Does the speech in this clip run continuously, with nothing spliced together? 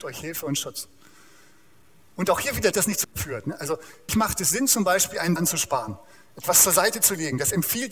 no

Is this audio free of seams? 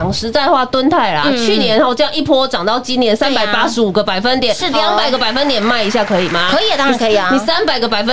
no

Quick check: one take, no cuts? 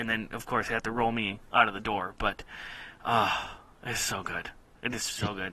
yes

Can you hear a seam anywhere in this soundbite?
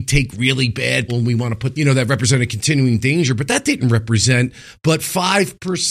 yes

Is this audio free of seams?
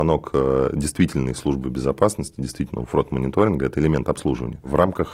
yes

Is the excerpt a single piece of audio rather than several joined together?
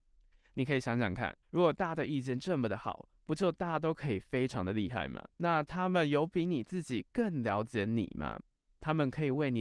no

